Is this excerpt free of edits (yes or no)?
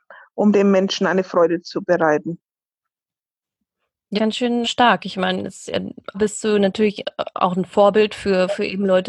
no